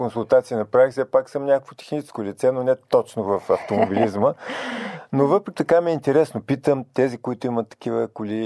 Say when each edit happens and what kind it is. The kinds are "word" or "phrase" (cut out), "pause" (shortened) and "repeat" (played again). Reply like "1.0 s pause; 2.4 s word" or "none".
5.6 s word